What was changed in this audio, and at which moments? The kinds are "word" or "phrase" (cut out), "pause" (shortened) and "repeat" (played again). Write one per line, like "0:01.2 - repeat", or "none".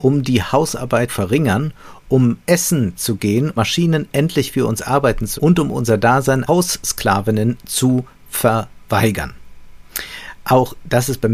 0:01.1 - word
0:02.4 - pause
0:03.6 - word
0:05.4 - word
0:06.5 - word